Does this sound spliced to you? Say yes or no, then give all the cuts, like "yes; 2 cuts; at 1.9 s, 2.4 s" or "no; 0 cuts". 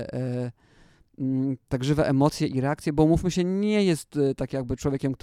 no; 0 cuts